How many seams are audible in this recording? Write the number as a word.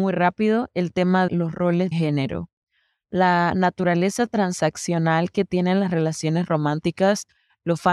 two